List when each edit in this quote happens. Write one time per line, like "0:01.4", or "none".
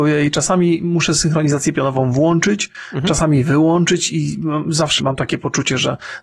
0:05.0